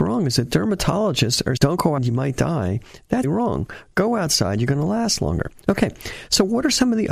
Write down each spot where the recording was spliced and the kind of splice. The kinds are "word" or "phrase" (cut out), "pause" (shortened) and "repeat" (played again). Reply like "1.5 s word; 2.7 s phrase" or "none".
1.6 s word; 2.0 s word; 3.2 s word